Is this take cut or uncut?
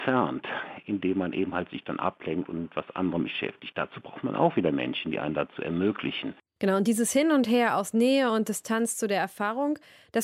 uncut